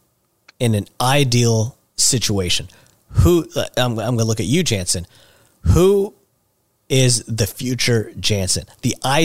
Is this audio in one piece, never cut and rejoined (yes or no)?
yes